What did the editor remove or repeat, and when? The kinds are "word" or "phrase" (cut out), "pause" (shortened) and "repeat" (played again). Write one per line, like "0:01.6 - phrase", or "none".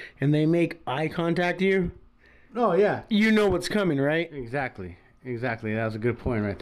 0:01.6 - word